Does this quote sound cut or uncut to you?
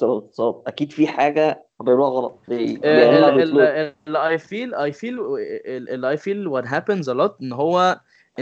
cut